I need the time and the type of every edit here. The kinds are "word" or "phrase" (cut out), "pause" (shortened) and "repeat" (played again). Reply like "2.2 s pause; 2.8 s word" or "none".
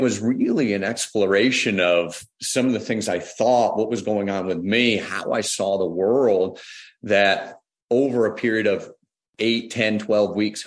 none